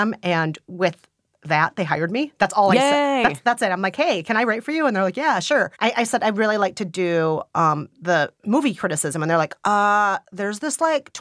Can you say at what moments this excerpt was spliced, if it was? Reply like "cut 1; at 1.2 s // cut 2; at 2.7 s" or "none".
cut 1; at 5.7 s